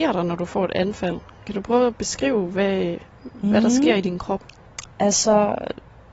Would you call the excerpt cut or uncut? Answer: uncut